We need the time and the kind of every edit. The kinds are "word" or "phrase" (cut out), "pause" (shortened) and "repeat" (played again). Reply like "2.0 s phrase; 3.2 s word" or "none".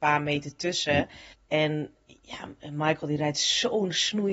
1.3 s pause